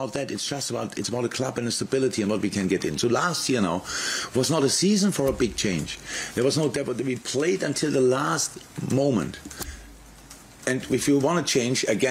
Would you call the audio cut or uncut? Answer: uncut